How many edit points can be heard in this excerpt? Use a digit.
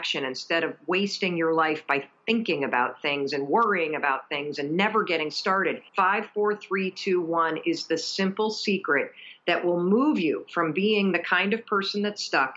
1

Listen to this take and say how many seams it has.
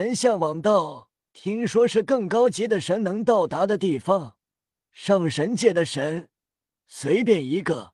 0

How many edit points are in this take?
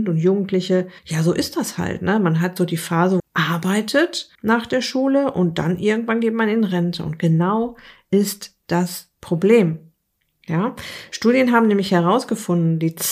3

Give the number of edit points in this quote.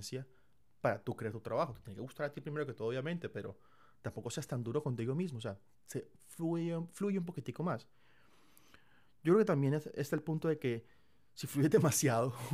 0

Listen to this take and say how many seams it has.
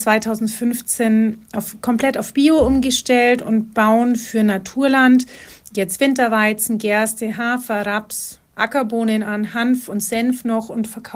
0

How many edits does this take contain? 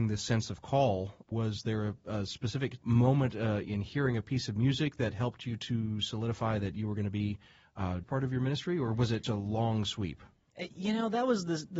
4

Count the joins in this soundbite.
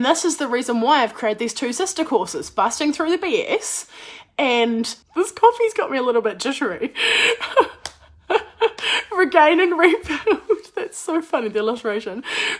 0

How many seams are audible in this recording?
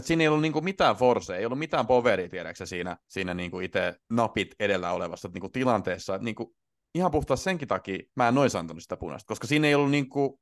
3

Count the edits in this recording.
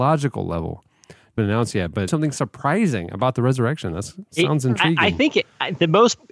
2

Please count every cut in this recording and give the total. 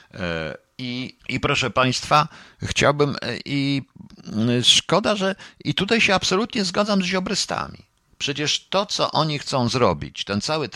1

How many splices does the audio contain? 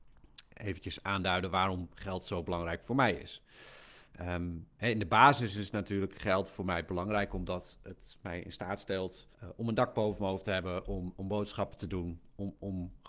1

